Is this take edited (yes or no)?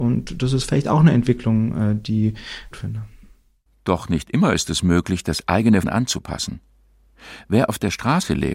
yes